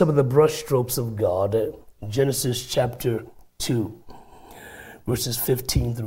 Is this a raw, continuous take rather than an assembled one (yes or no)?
yes